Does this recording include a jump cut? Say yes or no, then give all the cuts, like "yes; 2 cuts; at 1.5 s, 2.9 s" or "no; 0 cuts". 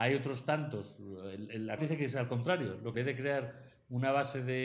yes; 2 cuts; at 1.8 s, 2.9 s